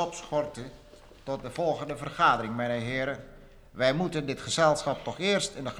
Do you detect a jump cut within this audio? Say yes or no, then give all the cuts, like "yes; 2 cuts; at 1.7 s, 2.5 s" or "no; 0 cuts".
no; 0 cuts